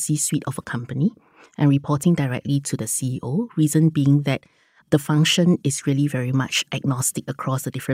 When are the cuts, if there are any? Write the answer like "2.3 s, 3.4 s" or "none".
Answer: none

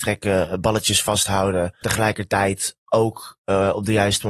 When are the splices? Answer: 1.8 s

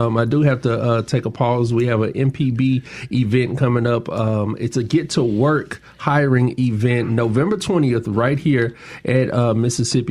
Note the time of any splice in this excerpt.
none

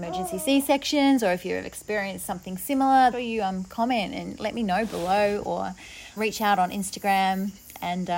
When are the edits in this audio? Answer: 3.1 s, 6.2 s

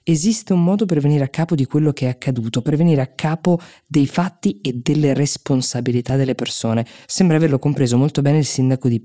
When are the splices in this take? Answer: none

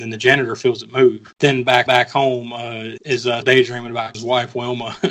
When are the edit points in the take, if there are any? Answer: 1.9 s, 3.0 s, 3.4 s, 4.1 s

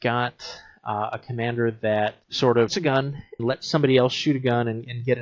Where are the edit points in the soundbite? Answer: 2.2 s, 2.7 s, 3.4 s

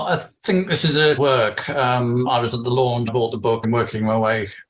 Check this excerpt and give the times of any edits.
1.2 s, 3.1 s, 3.6 s

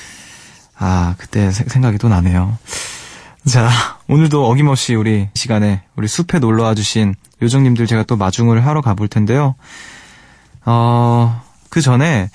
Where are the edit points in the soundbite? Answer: 5.4 s

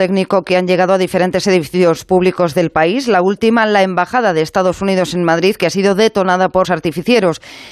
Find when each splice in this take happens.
6.6 s

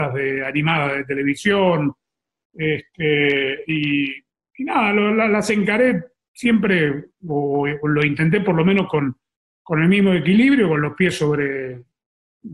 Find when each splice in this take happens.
none

